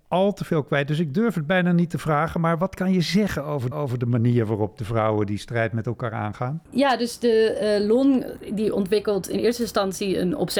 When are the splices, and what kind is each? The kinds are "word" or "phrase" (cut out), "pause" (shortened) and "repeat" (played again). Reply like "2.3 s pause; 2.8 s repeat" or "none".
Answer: 3.7 s repeat